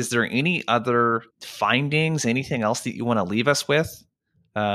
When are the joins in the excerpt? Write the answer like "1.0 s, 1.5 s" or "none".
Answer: 1.3 s

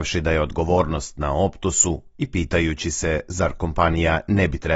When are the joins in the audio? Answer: none

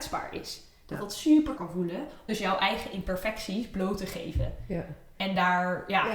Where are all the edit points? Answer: 1.6 s, 2.3 s

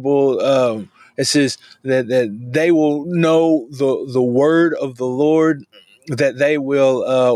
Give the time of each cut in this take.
none

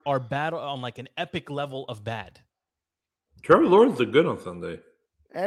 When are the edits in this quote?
none

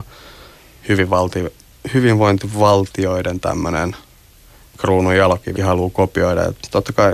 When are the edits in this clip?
5.6 s

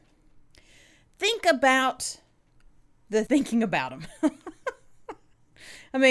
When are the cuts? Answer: 3.3 s

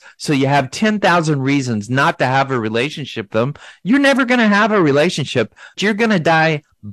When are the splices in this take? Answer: 3.3 s, 5.8 s

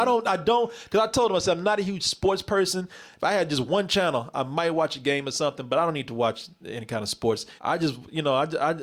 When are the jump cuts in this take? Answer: 7.6 s

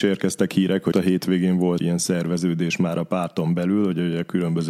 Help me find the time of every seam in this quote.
0.9 s, 1.8 s

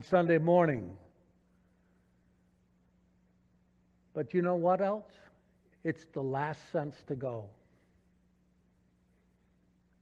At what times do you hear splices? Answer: none

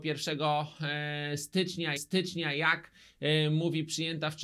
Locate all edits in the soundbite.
2.0 s

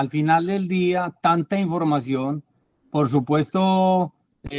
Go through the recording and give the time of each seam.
none

